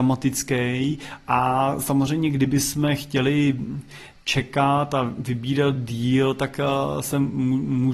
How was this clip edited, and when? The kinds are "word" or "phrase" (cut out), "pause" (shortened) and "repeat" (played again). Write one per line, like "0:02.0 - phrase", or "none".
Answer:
none